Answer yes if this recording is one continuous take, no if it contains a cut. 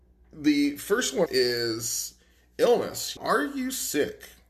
no